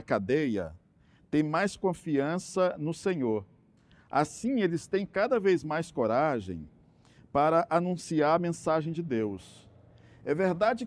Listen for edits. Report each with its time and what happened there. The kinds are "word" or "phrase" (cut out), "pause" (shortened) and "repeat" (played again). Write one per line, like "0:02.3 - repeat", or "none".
none